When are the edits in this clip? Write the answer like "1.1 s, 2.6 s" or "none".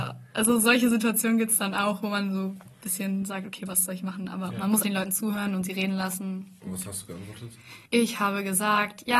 4.8 s, 7.9 s

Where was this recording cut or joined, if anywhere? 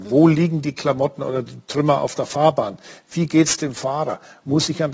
none

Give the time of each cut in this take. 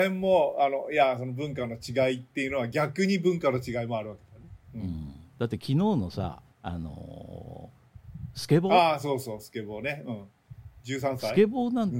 4.6 s, 5.3 s, 6.5 s

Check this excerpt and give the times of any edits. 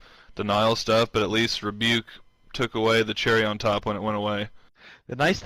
none

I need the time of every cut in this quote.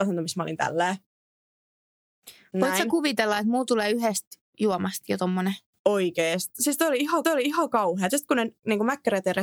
7.2 s

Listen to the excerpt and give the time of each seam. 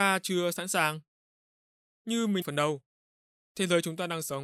2.4 s

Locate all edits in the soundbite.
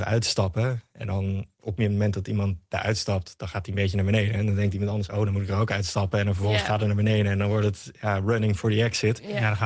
none

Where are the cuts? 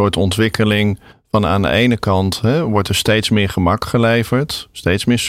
1.1 s

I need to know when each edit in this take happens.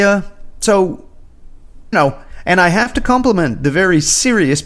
1.9 s

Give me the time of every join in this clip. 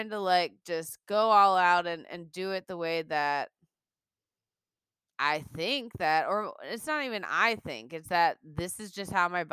none

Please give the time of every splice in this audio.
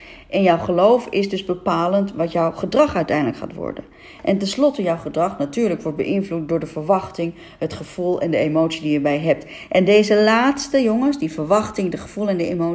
none

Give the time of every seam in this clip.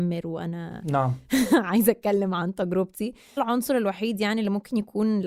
3.4 s

